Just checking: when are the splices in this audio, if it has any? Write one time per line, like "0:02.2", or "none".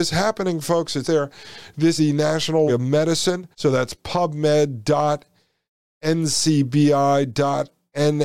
0:01.0
0:02.0
0:02.7
0:03.5